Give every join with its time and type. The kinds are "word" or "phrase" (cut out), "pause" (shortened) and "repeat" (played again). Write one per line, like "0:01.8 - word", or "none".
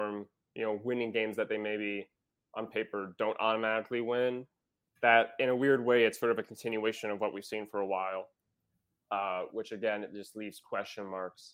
none